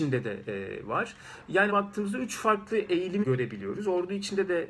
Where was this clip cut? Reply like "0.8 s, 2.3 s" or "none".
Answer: 1.7 s, 3.2 s